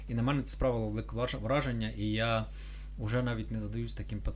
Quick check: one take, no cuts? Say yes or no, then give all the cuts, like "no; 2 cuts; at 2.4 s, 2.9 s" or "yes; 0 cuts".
yes; 0 cuts